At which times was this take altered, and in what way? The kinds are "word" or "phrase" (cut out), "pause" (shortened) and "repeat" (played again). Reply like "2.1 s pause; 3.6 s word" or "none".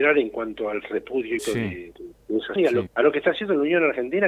1.4 s word; 2.6 s word; 2.9 s word